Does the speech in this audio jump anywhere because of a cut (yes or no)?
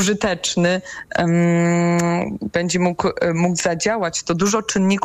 no